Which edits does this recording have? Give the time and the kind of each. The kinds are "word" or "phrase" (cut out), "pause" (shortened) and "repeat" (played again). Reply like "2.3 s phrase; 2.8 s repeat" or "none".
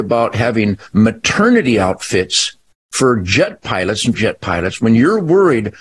2.7 s pause; 4.1 s word